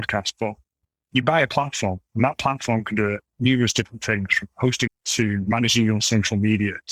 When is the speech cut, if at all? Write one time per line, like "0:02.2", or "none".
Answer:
0:04.9